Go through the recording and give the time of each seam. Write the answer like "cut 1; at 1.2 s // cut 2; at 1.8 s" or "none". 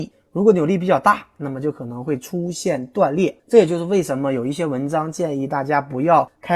cut 1; at 3.4 s